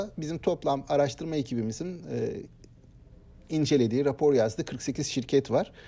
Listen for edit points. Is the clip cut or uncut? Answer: uncut